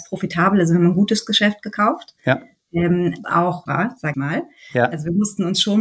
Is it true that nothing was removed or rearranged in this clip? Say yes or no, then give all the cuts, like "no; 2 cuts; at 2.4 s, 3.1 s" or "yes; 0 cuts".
no; 3 cuts; at 3.2 s, 3.7 s, 4.1 s